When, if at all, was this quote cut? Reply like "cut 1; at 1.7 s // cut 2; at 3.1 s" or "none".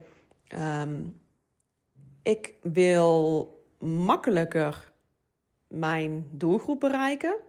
none

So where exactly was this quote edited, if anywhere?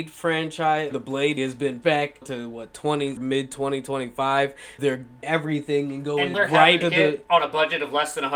cut 1; at 0.9 s // cut 2; at 1.4 s // cut 3; at 1.8 s // cut 4; at 2.2 s // cut 5; at 3.2 s // cut 6; at 4.8 s // cut 7; at 5.2 s // cut 8; at 6.3 s // cut 9; at 6.8 s

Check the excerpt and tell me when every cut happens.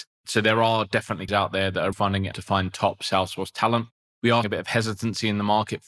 cut 1; at 1.3 s // cut 2; at 1.9 s // cut 3; at 2.3 s // cut 4; at 4.4 s

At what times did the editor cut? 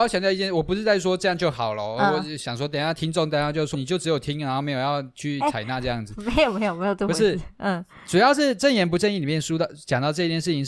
cut 1; at 3.7 s

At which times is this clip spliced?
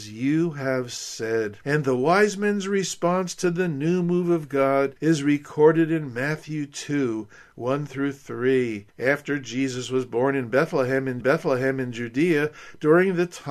cut 1; at 1.6 s // cut 2; at 5.0 s // cut 3; at 8.9 s // cut 4; at 11.2 s

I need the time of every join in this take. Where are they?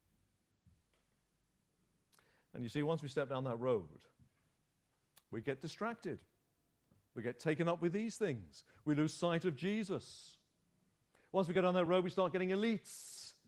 none

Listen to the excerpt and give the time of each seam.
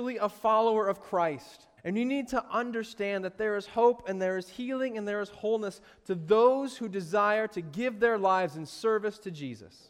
cut 1; at 1.8 s

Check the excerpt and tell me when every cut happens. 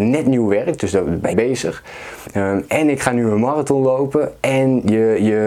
cut 1; at 1.3 s

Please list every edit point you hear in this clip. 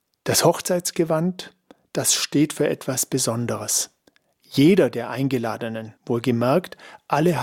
cut 1; at 6.0 s

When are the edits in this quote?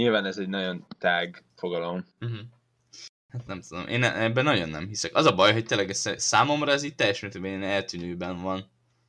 cut 1; at 2.1 s

